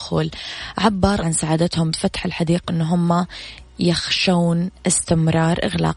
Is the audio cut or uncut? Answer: cut